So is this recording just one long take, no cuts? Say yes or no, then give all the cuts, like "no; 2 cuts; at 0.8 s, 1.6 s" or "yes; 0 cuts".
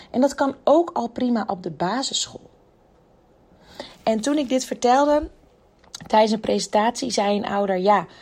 yes; 0 cuts